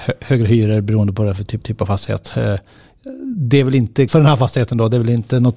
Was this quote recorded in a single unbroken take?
no; 2 cuts; at 1.6 s, 4.1 s

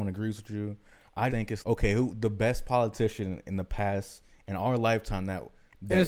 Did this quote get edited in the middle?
yes; 2 cuts; at 1.3 s, 1.6 s

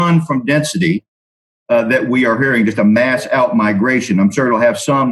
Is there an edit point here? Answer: no; 0 cuts

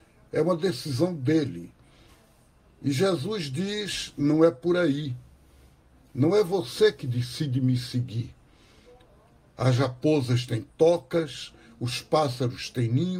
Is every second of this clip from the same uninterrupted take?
yes; 0 cuts

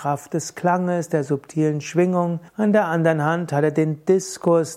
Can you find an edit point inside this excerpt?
yes; 1 cut; at 2.5 s

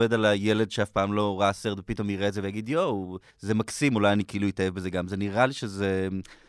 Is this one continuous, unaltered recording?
no; 1 cut; at 3.3 s

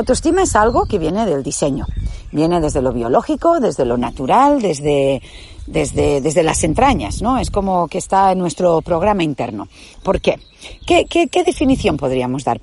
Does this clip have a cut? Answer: no; 0 cuts

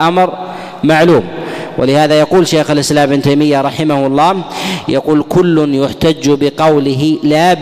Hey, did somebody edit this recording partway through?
no; 0 cuts

